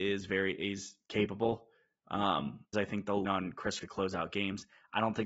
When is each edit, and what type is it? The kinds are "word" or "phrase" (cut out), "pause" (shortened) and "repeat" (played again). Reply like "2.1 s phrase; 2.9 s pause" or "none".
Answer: 2.7 s word; 3.2 s word; 3.8 s word